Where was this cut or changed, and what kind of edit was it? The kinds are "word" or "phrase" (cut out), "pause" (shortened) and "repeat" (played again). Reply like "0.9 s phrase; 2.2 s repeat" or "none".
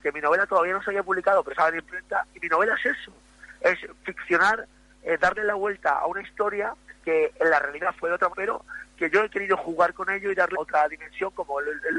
1.5 s word; 7.0 s word; 8.3 s word; 10.5 s word